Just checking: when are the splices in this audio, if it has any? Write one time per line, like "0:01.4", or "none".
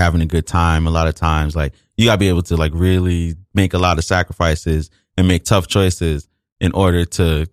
none